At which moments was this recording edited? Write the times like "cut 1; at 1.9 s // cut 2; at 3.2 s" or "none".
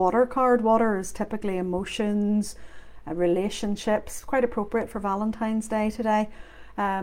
none